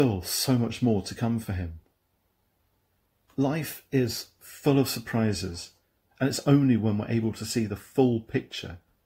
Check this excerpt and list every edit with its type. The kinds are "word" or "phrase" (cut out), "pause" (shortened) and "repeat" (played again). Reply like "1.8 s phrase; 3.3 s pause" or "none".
none